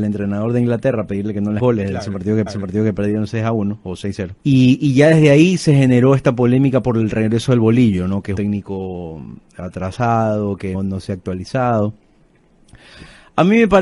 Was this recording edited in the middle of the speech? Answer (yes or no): yes